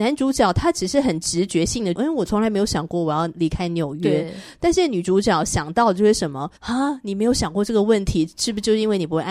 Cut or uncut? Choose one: cut